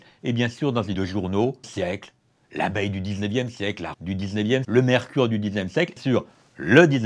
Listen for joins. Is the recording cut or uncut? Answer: cut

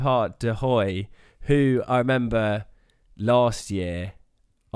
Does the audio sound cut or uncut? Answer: uncut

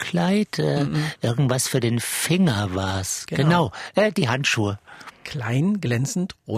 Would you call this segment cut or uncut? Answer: uncut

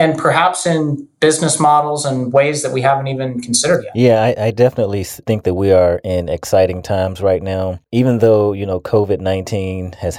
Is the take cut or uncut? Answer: cut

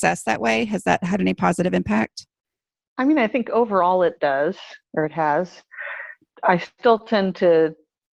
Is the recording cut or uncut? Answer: cut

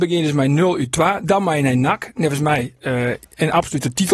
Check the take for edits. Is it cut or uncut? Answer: uncut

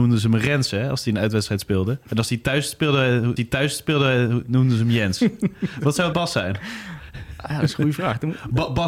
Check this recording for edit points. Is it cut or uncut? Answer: cut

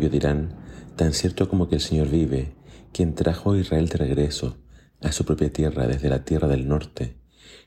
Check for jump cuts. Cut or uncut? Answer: uncut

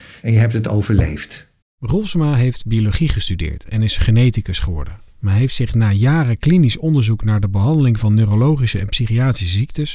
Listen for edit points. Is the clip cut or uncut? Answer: cut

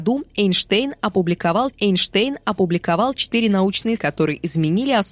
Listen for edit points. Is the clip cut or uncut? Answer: cut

